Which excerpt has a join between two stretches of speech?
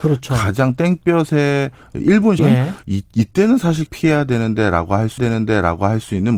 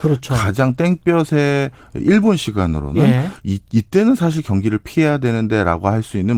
first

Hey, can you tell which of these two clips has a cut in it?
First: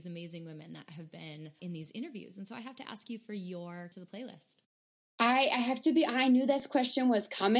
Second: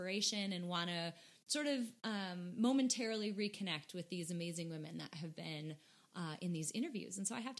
first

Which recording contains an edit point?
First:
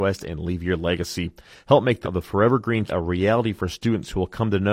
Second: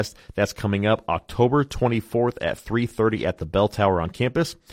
first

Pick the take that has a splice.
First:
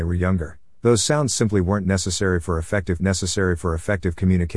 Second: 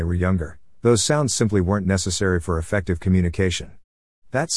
first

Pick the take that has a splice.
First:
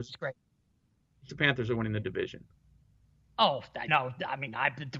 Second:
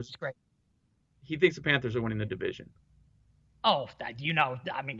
first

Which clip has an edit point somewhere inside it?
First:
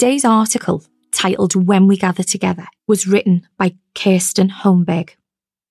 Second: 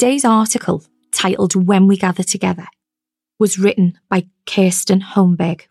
first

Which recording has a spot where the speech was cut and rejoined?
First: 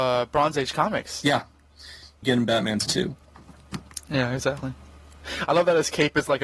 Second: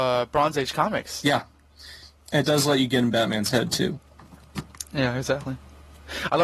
first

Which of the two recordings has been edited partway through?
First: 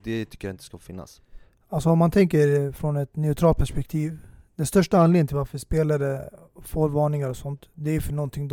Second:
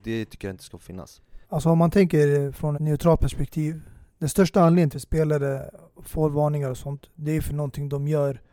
second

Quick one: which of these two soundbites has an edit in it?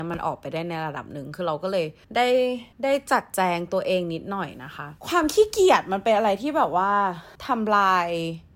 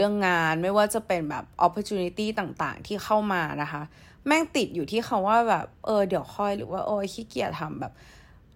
first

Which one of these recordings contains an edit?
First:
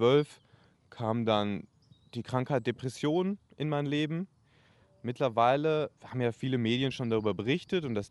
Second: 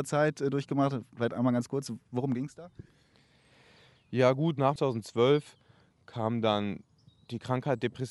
first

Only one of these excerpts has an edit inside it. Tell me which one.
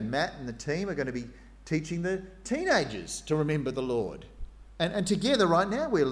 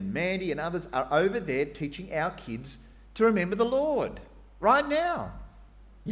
first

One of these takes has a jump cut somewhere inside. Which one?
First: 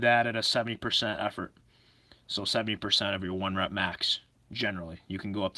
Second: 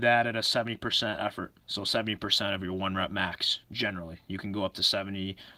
second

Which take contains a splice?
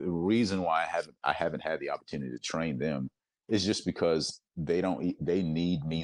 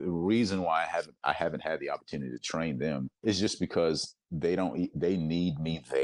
second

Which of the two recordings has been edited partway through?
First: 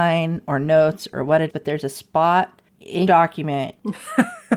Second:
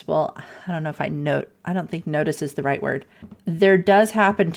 first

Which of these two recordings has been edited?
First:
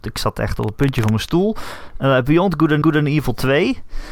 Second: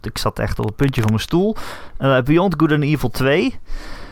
first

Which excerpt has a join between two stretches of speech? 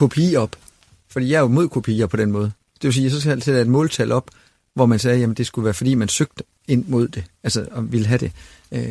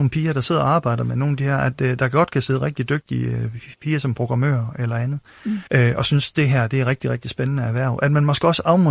second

